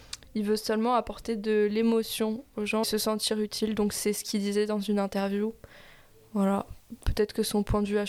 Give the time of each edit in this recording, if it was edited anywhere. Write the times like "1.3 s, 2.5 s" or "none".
2.8 s